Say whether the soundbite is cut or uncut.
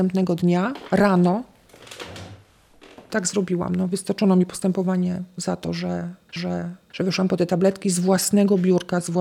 cut